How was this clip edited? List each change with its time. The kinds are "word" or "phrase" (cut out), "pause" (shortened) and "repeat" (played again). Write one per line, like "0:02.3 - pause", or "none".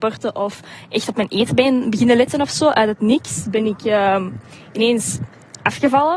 none

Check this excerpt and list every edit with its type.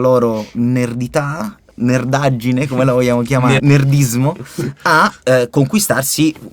0:03.6 - word

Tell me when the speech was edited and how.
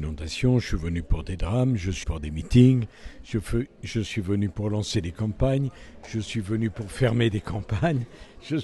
0:02.0 - word

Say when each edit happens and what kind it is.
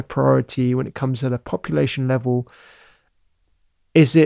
none

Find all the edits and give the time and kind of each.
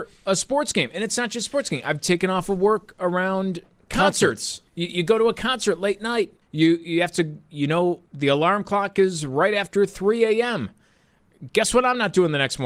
0:04.7 - pause
0:06.4 - pause
0:08.1 - pause

